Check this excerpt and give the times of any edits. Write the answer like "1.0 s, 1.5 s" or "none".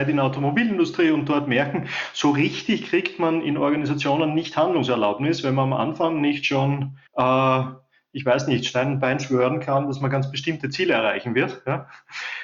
7.1 s